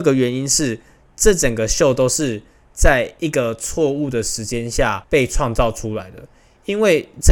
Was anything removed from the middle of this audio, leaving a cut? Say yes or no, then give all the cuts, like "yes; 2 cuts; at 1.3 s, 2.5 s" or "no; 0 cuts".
no; 0 cuts